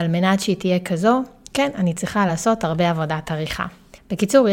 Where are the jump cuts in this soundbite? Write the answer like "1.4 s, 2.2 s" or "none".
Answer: none